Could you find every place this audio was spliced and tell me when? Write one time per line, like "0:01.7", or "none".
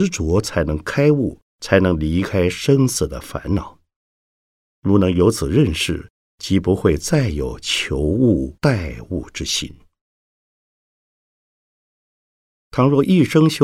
0:01.5
0:04.4
0:08.6